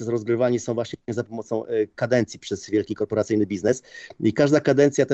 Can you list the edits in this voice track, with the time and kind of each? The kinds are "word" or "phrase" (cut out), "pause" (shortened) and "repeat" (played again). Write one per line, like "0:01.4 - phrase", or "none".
none